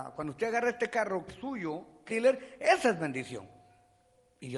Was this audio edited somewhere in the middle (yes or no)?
yes